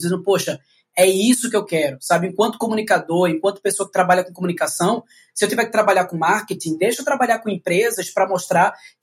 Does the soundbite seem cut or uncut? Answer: uncut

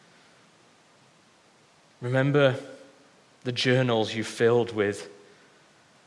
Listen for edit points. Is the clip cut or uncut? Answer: uncut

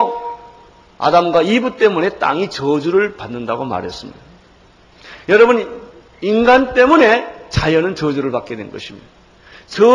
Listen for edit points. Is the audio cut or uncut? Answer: uncut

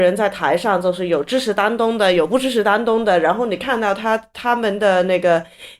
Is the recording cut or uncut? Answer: uncut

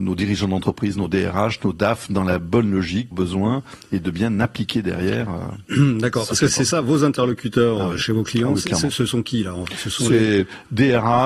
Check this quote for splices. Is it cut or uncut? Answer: cut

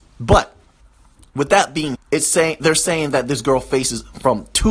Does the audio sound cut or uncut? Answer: cut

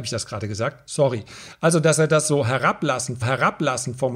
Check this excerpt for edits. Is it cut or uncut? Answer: cut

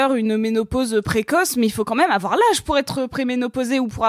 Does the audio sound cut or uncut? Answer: uncut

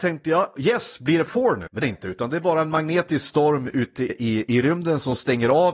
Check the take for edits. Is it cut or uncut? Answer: cut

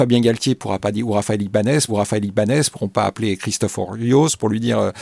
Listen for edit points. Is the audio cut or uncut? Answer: cut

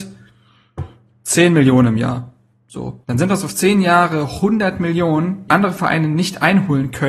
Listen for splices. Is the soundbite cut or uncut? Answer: cut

